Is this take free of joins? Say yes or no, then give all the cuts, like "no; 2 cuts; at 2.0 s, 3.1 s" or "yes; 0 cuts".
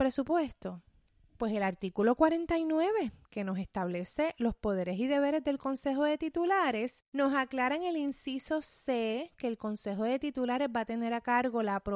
no; 1 cut; at 7.1 s